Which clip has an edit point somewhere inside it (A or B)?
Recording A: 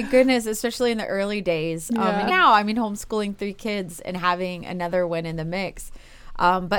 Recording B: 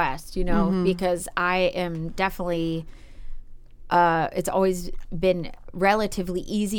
A